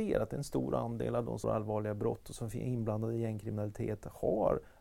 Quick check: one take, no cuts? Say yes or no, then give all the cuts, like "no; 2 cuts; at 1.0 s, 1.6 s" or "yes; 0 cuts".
no; 1 cut; at 1.4 s